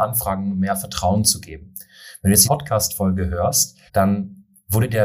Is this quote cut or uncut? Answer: cut